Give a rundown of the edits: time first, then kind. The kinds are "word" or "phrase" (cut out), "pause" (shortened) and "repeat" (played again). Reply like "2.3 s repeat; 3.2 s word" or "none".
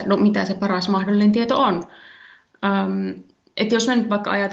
none